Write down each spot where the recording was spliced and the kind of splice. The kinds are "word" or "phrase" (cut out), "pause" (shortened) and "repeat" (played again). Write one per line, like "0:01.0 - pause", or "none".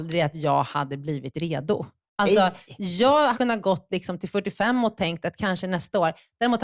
0:03.3 - word